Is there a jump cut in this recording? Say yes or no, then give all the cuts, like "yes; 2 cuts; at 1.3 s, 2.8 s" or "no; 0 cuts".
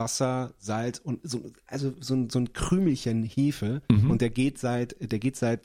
no; 0 cuts